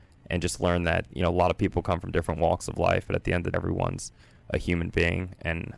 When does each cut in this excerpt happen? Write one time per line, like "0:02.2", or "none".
0:01.1
0:03.5